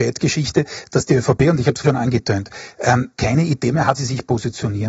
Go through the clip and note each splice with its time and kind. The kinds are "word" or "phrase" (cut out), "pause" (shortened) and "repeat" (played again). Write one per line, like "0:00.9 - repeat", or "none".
0:01.8 - word
0:03.2 - word
0:04.0 - word